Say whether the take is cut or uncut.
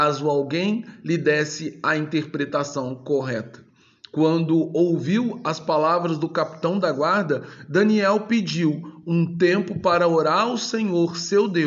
uncut